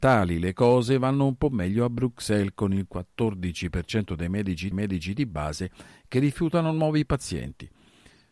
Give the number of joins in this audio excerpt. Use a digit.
1